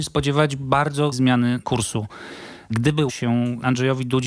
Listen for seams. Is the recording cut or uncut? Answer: cut